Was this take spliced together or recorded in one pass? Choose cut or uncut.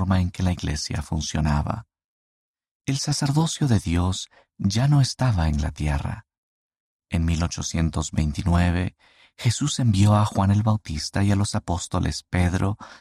uncut